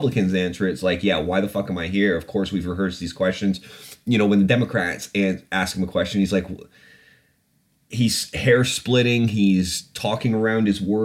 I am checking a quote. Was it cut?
no; 0 cuts

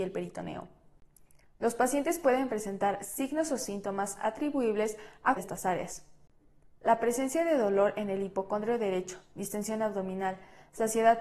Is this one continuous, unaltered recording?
no; 1 cut; at 5.4 s

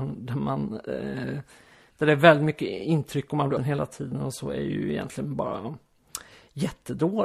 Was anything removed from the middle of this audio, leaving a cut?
yes; 1 cut; at 3.6 s

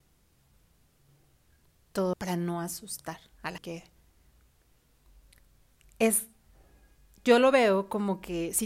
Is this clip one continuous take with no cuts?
no; 2 cuts; at 2.1 s, 3.6 s

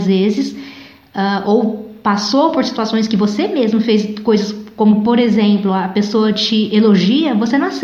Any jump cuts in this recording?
no; 0 cuts

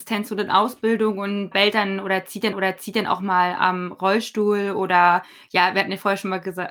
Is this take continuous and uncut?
no; 2 cuts; at 1.5 s, 2.5 s

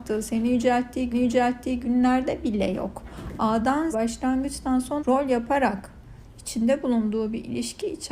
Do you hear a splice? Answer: yes; 3 cuts; at 1.1 s, 3.9 s, 5.0 s

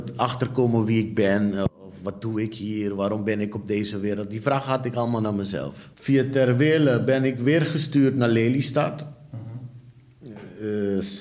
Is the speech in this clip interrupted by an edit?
yes; 1 cut; at 5.9 s

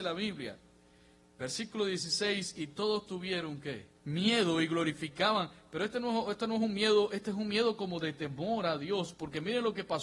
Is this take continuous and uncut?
no; 1 cut; at 3.9 s

